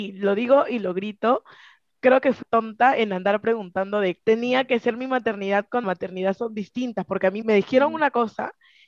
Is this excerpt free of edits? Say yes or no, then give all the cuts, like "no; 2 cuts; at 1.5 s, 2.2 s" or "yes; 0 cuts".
no; 4 cuts; at 2.4 s, 4.2 s, 5.8 s, 7.4 s